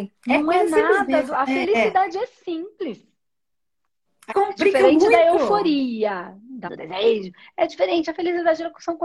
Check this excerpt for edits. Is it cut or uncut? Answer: cut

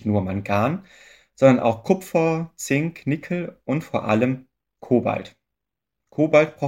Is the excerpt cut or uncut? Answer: uncut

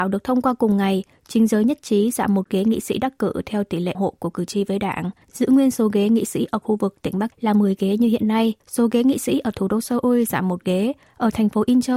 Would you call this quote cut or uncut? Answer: cut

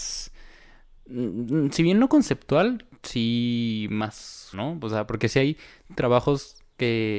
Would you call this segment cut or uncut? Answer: cut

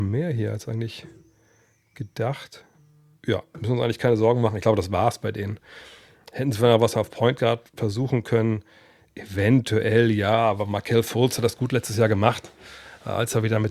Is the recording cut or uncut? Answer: uncut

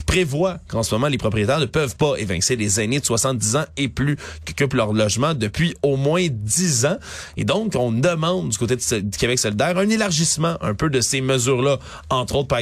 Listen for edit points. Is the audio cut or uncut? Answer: uncut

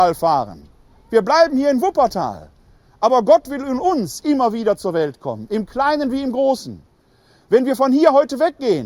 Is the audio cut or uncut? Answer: uncut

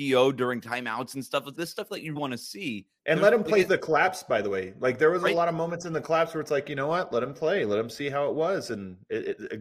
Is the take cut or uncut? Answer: cut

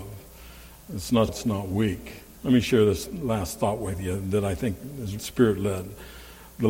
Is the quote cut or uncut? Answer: cut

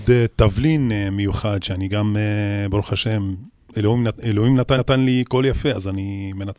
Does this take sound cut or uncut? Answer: cut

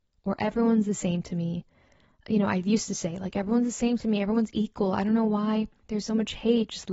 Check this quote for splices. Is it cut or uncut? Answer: cut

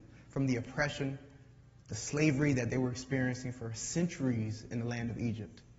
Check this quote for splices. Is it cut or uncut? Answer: uncut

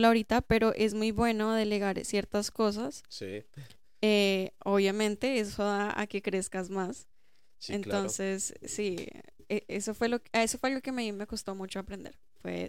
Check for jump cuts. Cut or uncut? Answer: uncut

